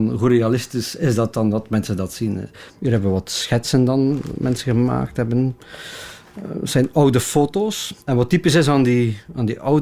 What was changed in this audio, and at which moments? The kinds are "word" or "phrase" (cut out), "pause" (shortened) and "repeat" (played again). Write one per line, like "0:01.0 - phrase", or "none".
0:02.7 - pause
0:08.0 - pause